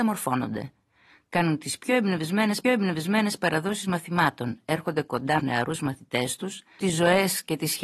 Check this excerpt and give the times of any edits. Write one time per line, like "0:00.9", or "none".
0:02.6
0:05.4
0:06.8